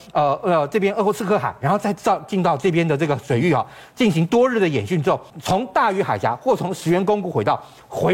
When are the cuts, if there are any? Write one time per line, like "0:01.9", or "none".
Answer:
0:05.3